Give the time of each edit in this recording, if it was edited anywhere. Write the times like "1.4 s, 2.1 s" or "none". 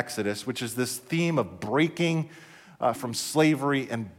3.0 s